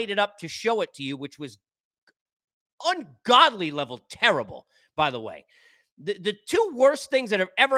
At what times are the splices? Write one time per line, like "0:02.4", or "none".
none